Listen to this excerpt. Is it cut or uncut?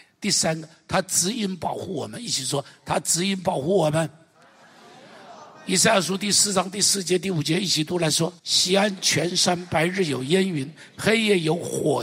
cut